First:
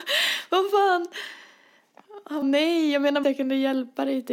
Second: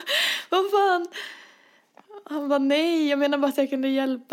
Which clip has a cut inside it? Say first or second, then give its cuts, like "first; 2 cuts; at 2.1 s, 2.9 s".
first; 2 cuts; at 2.4 s, 3.2 s